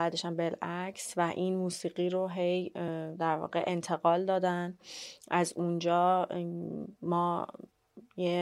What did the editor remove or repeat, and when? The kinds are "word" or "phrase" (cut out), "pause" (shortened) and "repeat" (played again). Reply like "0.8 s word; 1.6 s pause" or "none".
none